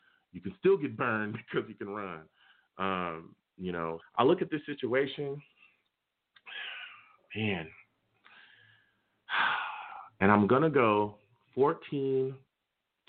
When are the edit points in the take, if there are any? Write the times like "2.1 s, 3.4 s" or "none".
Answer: 4.0 s